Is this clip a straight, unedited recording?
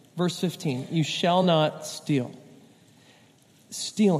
yes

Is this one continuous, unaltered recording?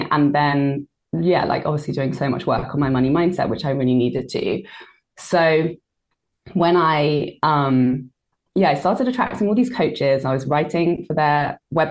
yes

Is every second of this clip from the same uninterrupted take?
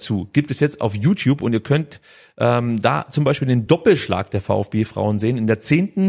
yes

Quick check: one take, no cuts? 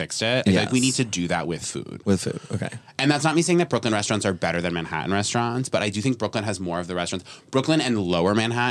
yes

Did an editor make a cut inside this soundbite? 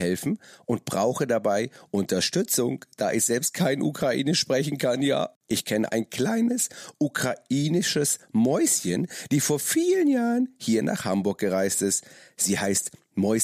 no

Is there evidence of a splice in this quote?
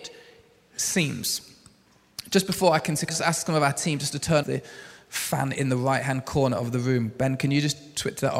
yes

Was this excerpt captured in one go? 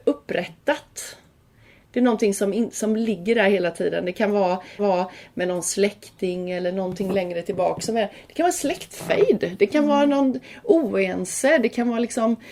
no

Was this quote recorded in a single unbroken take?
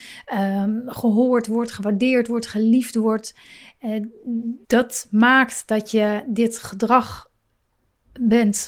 no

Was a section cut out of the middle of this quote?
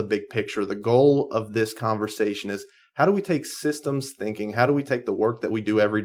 no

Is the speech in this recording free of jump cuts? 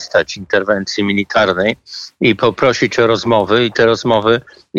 yes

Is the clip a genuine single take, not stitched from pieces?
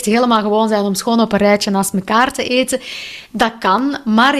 yes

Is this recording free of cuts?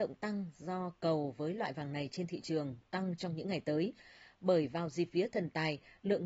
yes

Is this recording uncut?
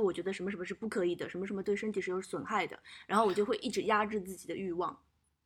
yes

